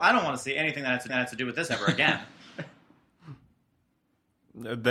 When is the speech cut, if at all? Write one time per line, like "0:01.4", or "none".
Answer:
0:01.1